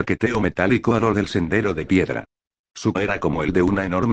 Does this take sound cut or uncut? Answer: cut